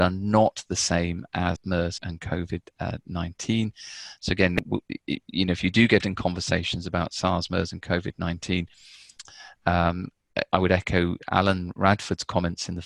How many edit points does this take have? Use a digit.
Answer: 3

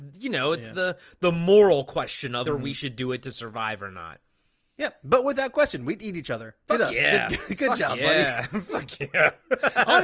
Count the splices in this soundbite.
1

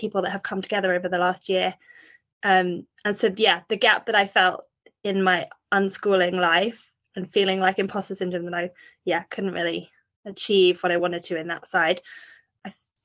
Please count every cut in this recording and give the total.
0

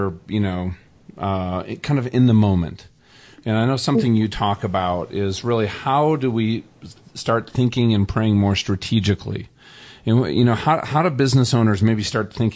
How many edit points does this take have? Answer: 0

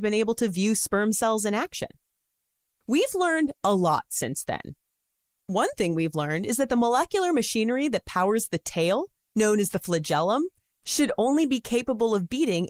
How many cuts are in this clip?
0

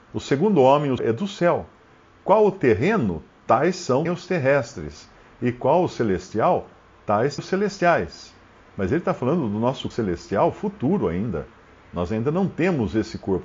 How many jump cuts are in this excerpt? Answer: 4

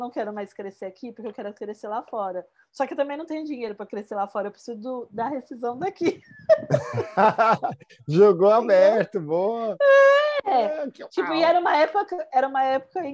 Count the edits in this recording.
0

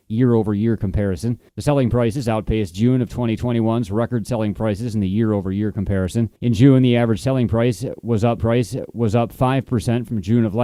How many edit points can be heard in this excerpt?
3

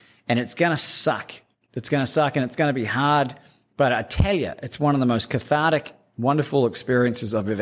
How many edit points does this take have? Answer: 0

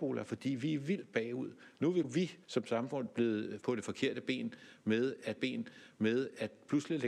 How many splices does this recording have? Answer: 4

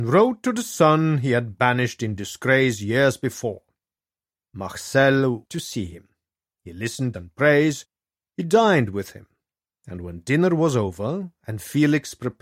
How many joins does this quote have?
2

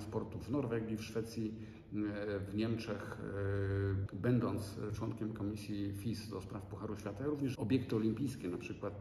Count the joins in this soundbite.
2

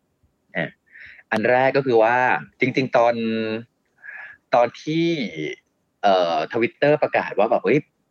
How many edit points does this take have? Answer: 1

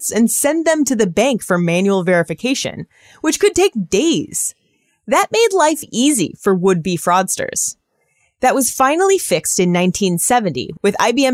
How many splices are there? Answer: 0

